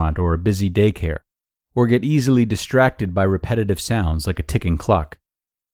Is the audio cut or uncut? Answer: uncut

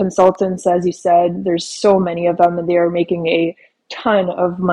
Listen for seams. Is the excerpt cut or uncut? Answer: uncut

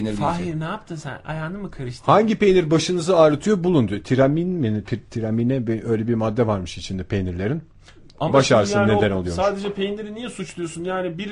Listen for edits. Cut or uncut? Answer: uncut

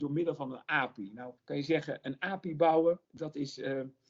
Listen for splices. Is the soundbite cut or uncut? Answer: cut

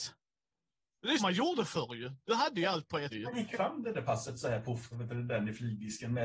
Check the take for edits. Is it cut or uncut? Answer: cut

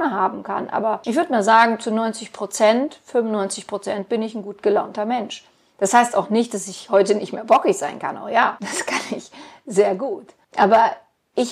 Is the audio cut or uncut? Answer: uncut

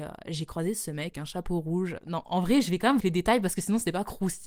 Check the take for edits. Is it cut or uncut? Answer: cut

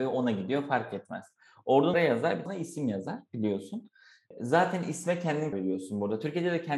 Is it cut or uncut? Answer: cut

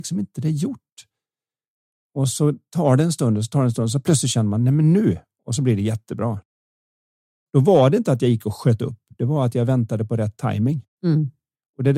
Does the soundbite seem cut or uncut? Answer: uncut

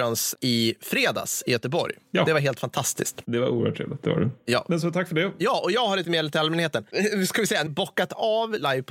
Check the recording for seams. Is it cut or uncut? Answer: cut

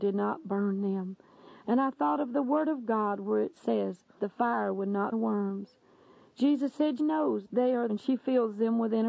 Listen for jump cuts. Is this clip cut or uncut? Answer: cut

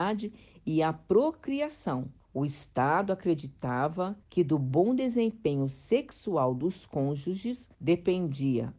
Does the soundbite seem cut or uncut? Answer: cut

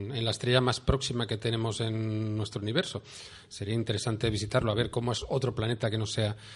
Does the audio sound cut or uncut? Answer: uncut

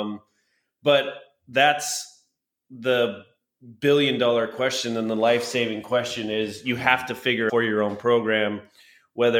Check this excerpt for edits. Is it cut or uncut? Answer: cut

